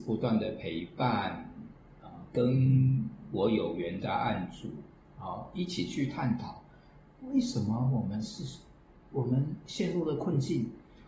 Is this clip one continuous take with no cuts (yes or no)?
yes